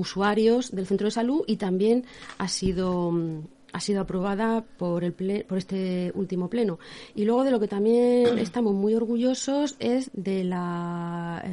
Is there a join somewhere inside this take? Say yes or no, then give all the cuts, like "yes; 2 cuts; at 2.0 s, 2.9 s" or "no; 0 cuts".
yes; 1 cut; at 10.1 s